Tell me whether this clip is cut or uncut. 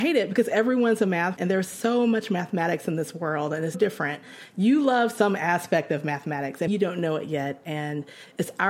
cut